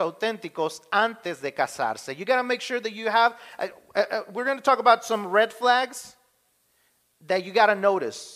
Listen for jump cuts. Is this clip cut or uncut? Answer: uncut